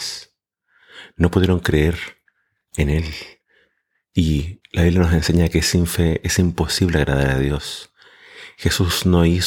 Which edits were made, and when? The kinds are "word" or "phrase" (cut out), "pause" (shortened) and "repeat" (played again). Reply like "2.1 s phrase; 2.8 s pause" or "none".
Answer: none